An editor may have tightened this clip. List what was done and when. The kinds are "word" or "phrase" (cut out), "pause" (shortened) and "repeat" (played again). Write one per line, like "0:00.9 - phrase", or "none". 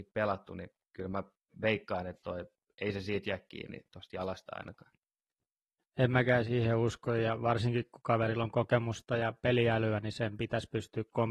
none